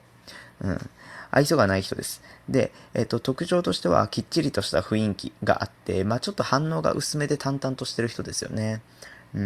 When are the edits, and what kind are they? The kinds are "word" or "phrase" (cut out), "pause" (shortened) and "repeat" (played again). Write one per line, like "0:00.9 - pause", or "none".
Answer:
0:05.4 - pause